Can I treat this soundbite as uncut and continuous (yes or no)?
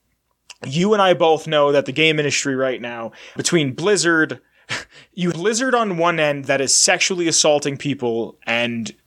no